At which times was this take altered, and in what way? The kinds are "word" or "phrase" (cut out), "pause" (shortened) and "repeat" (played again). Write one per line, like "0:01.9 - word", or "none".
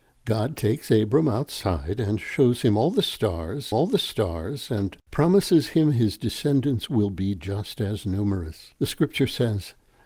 0:03.7 - repeat
0:08.8 - pause